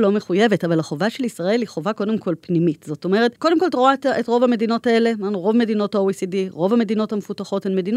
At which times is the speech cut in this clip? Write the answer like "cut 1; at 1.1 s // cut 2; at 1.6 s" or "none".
cut 1; at 3.4 s